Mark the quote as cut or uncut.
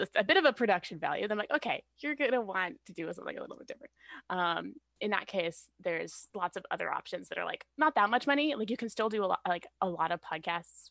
cut